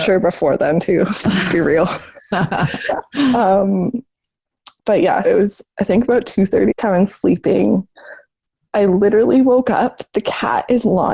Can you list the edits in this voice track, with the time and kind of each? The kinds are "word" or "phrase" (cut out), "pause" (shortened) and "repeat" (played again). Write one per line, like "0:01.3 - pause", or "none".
0:04.8 - pause
0:05.2 - word
0:06.7 - phrase